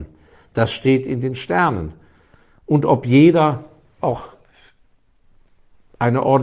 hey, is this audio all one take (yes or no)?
yes